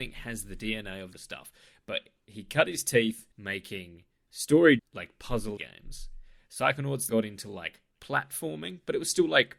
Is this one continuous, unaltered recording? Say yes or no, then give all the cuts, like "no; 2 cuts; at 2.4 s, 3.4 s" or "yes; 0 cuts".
no; 6 cuts; at 1.1 s, 3.3 s, 4.8 s, 5.6 s, 7.1 s, 7.9 s